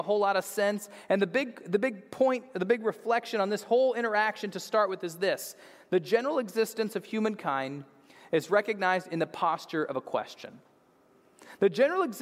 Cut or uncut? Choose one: uncut